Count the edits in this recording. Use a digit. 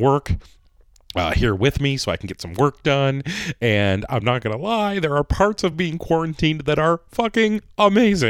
0